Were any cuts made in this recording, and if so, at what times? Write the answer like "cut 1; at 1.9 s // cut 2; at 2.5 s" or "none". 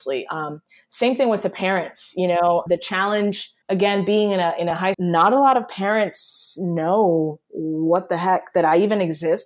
cut 1; at 2.7 s // cut 2; at 3.6 s // cut 3; at 4.9 s